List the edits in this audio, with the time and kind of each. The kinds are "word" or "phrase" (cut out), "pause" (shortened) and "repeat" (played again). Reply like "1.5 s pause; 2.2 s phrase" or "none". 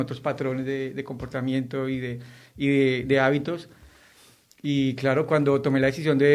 none